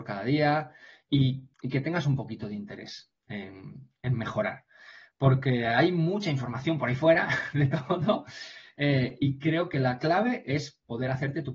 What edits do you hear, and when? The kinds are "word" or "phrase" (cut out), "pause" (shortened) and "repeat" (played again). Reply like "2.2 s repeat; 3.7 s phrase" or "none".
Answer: 1.5 s pause; 3.2 s pause

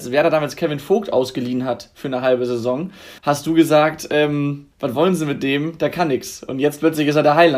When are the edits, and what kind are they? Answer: 3.2 s pause; 4.7 s pause

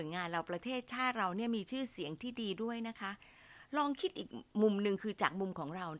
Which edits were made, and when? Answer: none

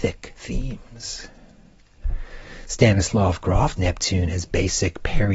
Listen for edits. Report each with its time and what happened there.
3.8 s word

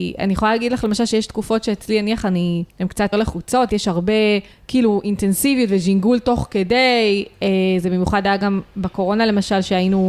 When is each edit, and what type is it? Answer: 2.7 s pause; 3.1 s word; 3.7 s word; 4.5 s pause

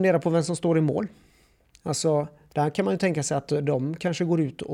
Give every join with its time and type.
none

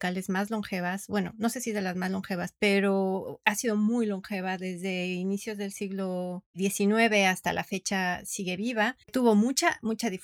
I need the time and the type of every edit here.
9.0 s pause

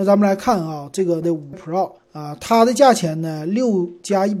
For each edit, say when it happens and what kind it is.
1.2 s word; 1.5 s word; 2.0 s pause

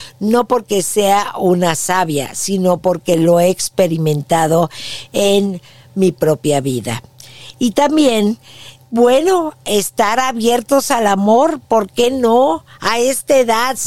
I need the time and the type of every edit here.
none

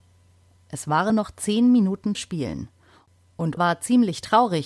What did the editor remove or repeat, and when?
1.1 s word; 2.1 s word; 3.6 s word

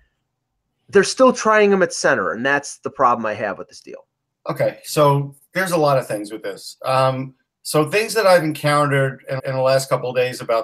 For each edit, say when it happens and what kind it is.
9.4 s repeat

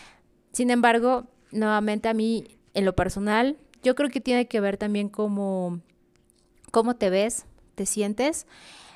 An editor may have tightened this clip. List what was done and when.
none

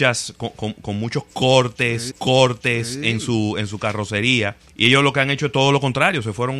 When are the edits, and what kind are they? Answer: 2.1 s repeat; 4.7 s pause

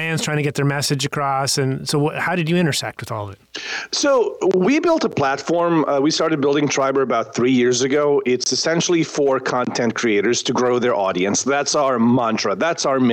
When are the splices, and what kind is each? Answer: none

